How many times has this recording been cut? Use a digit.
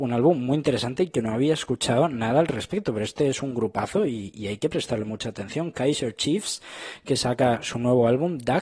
0